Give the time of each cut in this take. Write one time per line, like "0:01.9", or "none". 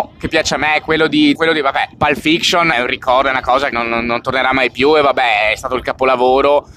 0:01.3
0:01.9
0:02.7
0:03.7